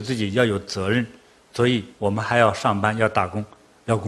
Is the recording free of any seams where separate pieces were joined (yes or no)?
yes